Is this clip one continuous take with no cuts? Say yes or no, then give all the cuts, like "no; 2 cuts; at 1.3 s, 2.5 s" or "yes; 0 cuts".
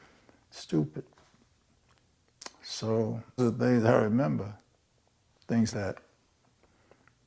no; 2 cuts; at 3.4 s, 5.7 s